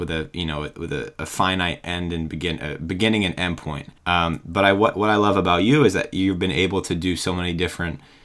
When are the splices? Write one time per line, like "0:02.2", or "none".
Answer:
0:04.0